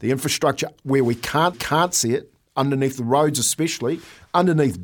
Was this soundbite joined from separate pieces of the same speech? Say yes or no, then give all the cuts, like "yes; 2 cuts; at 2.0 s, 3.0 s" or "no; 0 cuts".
yes; 1 cut; at 1.5 s